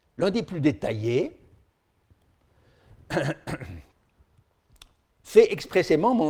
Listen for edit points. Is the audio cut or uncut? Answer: uncut